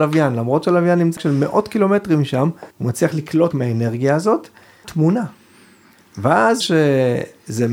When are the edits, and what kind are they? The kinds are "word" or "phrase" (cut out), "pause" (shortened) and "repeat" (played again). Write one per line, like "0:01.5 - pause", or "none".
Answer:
0:01.2 - word
0:02.7 - pause
0:03.5 - word
0:04.8 - phrase
0:06.6 - word